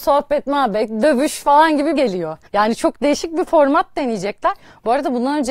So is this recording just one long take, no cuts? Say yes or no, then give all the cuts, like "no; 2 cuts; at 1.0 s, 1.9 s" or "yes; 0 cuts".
no; 2 cuts; at 2.0 s, 2.5 s